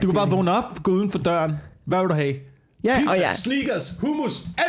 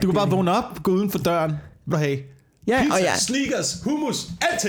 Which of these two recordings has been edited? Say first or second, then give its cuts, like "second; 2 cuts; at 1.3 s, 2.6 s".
second; 1 cut; at 1.9 s